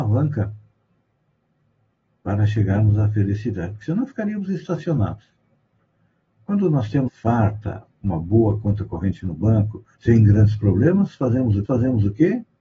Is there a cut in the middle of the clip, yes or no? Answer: yes